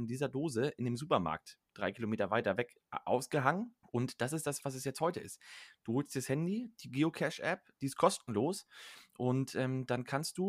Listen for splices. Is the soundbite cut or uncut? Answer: cut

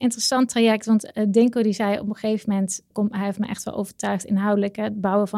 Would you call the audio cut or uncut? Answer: cut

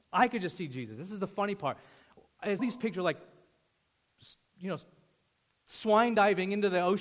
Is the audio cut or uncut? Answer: cut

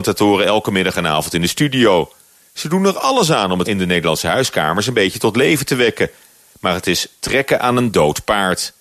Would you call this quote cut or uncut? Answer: cut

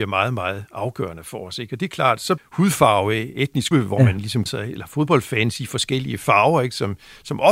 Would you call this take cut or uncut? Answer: cut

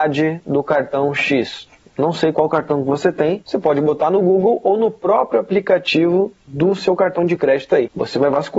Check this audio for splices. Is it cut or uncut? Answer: uncut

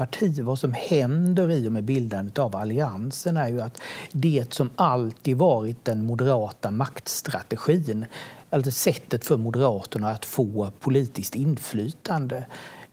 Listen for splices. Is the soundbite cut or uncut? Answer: uncut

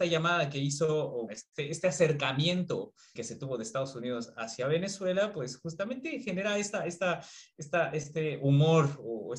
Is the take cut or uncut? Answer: cut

